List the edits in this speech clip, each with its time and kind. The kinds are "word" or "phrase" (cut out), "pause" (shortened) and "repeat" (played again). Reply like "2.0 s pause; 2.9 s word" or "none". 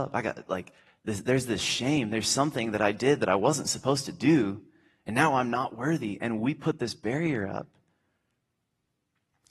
none